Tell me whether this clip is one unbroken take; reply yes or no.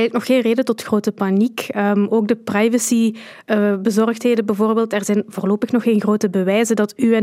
yes